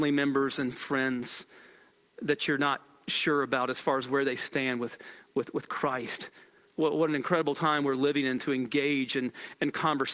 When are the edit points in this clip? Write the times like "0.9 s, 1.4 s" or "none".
none